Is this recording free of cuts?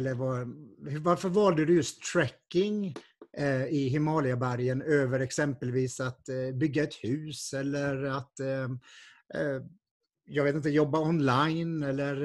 yes; 0 cuts

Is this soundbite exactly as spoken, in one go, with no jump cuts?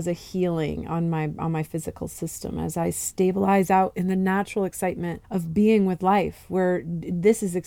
no; 1 cut; at 5.2 s

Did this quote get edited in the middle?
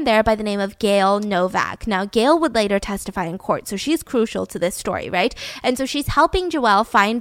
no; 0 cuts

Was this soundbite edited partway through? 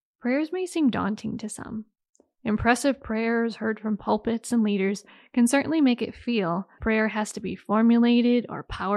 yes; 1 cut; at 6.8 s

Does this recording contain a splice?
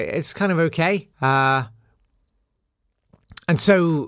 yes; 1 cut; at 1.1 s

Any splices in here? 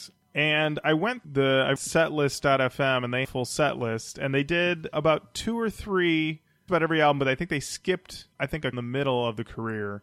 yes; 7 cuts; at 1.2 s, 1.8 s, 3.2 s, 4.9 s, 6.7 s, 8.3 s, 8.7 s

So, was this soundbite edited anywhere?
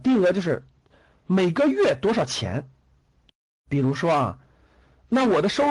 no; 0 cuts

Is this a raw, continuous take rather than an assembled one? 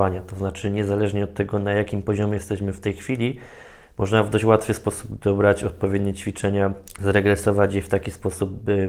yes; 0 cuts

